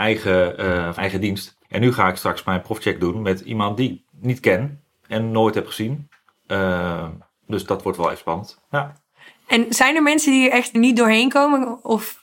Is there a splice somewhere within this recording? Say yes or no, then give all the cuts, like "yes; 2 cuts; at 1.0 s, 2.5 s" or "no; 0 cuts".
yes; 3 cuts; at 1.0 s, 1.6 s, 10.7 s